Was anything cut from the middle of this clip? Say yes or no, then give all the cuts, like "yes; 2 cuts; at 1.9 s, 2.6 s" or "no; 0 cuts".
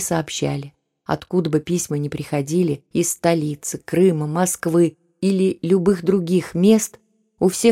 yes; 1 cut; at 2.9 s